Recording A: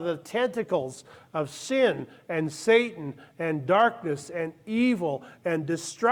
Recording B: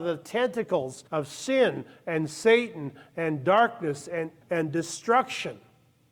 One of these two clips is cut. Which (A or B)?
B